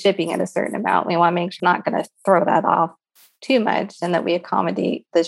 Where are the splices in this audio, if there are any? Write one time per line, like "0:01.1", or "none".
0:01.6